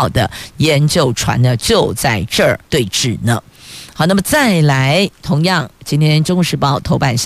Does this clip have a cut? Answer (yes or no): yes